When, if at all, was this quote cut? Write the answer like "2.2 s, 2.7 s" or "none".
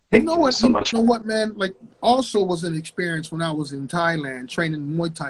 0.9 s, 1.9 s